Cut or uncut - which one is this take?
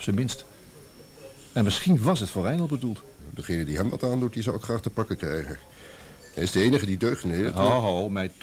uncut